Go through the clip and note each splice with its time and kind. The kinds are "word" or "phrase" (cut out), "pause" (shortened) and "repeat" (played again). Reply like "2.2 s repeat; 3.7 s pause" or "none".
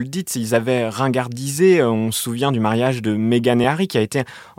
none